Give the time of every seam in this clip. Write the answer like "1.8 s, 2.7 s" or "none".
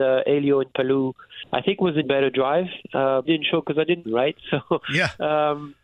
2.0 s, 3.2 s, 4.0 s